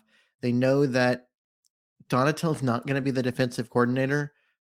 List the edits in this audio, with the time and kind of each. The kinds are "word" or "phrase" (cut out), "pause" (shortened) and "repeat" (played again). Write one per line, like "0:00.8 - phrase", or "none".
none